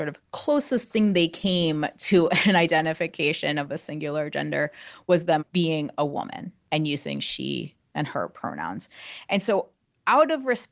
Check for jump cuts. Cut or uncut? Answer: uncut